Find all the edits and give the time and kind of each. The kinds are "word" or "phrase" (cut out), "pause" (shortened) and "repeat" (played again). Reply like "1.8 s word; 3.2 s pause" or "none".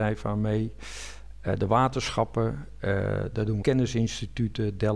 3.6 s word

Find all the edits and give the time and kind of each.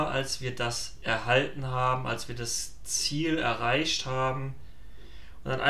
none

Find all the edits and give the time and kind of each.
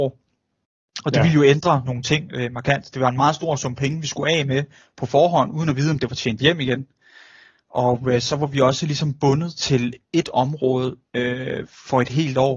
10.0 s pause; 11.1 s pause

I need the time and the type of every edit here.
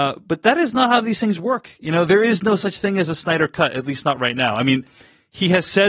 2.1 s word

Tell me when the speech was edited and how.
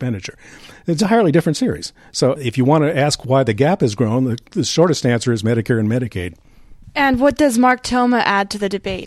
none

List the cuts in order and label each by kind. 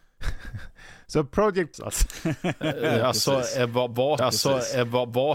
1.7 s word; 4.2 s repeat

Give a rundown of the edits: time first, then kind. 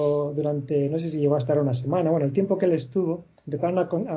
none

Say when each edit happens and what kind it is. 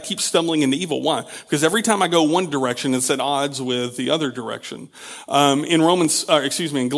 none

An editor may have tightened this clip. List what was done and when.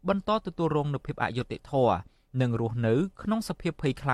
none

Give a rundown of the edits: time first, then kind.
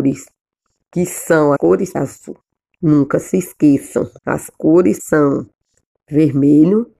1.6 s word; 1.9 s phrase; 4.2 s pause; 5.0 s word

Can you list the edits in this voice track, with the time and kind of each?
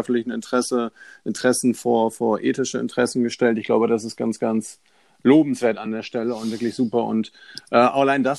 none

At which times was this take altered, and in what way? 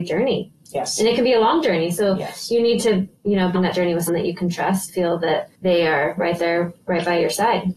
3.2 s pause; 3.5 s word; 4.1 s word; 4.9 s word; 5.5 s pause

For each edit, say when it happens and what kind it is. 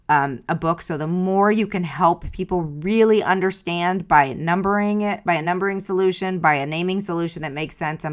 none

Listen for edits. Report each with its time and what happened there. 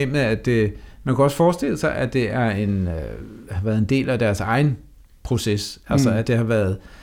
none

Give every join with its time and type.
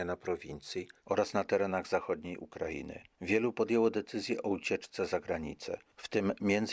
none

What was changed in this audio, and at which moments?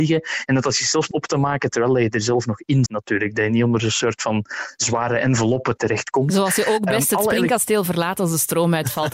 1.1 s word; 2.9 s word

